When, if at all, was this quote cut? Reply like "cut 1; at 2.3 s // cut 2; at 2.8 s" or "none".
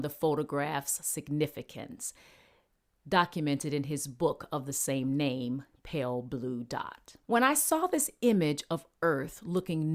cut 1; at 7.2 s

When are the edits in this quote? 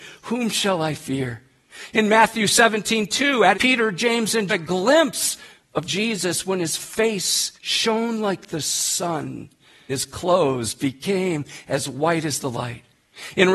cut 1; at 3.5 s // cut 2; at 4.5 s // cut 3; at 5.9 s // cut 4; at 7.6 s // cut 5; at 9.9 s

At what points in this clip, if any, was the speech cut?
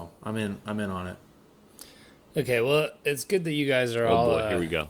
none

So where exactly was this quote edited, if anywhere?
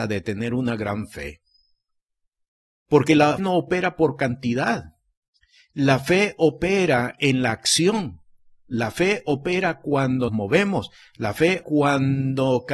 cut 1; at 3.4 s // cut 2; at 10.3 s // cut 3; at 11.6 s

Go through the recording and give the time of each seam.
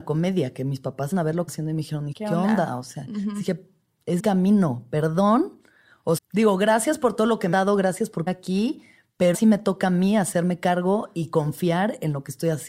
cut 1; at 1.1 s // cut 2; at 1.5 s // cut 3; at 2.1 s // cut 4; at 4.2 s // cut 5; at 6.2 s // cut 6; at 7.5 s // cut 7; at 8.3 s // cut 8; at 9.3 s

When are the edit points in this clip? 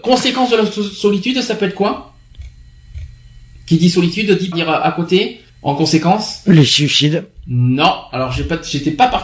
cut 1; at 4.5 s // cut 2; at 5.5 s

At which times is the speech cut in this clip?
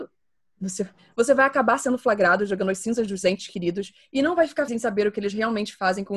cut 1; at 1.0 s // cut 2; at 3.2 s // cut 3; at 4.7 s

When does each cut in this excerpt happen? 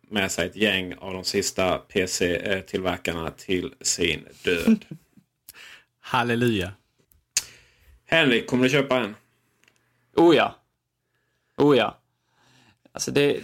none

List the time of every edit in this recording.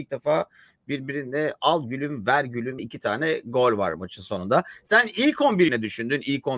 cut 1; at 2.8 s // cut 2; at 5.7 s

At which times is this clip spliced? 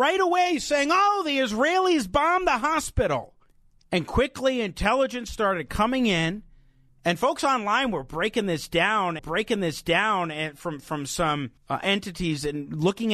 cut 1; at 3.5 s // cut 2; at 6.9 s // cut 3; at 9.2 s // cut 4; at 11.6 s

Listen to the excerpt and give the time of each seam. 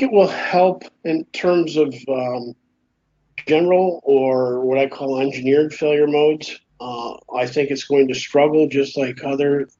cut 1; at 1.0 s // cut 2; at 6.7 s

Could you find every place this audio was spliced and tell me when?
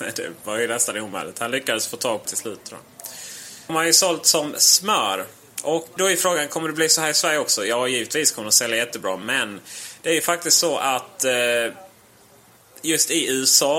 cut 1; at 2.2 s // cut 2; at 3.7 s // cut 3; at 6.0 s

